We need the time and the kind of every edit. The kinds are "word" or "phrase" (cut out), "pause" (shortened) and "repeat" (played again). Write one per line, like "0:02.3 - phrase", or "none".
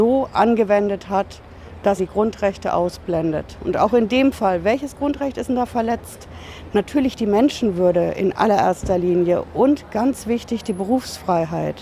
0:02.0 - word